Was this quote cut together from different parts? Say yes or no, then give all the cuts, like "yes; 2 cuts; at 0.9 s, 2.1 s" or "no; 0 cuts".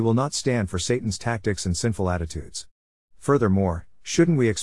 no; 0 cuts